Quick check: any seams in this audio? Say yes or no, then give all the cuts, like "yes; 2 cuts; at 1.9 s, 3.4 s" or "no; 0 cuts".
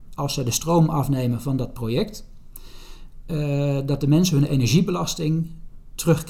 no; 0 cuts